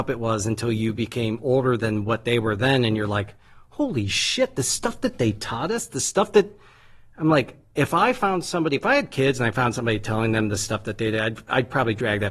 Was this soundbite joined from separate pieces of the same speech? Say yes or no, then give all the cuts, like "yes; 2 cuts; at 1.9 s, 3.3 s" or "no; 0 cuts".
no; 0 cuts